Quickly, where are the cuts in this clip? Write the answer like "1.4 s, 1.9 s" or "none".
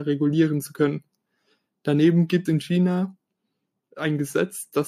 2.5 s, 3.7 s